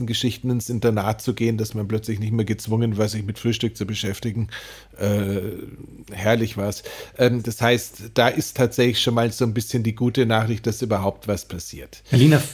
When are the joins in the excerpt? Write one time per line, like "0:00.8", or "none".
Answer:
none